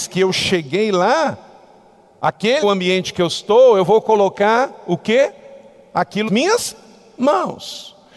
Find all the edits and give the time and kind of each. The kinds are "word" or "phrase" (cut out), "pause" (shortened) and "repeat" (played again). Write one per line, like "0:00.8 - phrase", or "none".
0:02.6 - word
0:06.3 - word